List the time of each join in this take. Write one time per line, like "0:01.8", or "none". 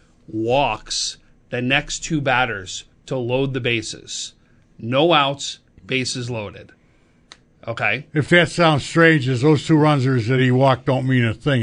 none